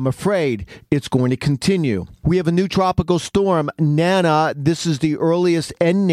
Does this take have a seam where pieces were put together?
no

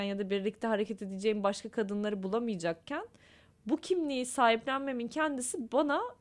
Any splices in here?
no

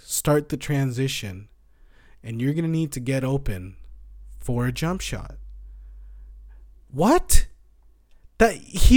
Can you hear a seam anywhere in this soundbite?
no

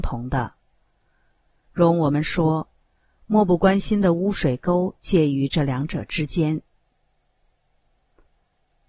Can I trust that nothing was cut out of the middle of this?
yes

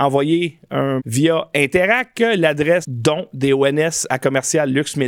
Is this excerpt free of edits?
no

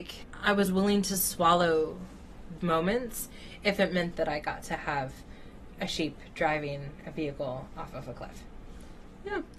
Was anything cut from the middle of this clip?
yes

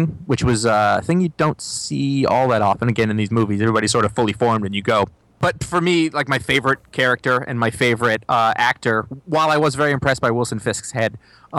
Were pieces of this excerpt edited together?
no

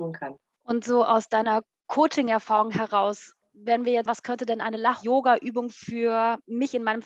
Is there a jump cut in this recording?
yes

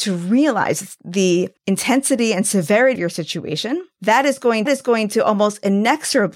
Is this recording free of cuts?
no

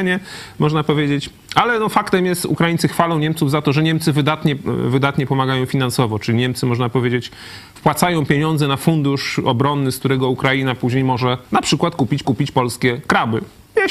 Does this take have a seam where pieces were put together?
yes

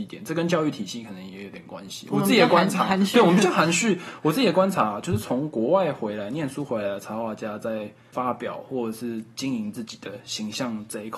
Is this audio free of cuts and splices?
yes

